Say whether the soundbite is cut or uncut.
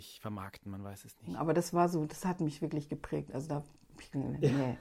uncut